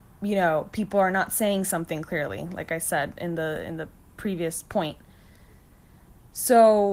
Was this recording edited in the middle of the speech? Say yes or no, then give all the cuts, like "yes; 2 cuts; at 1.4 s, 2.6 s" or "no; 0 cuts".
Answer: no; 0 cuts